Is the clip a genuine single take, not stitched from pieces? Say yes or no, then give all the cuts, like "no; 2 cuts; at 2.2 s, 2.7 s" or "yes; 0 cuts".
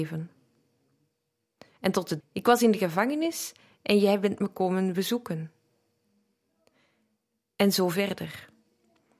no; 1 cut; at 2.2 s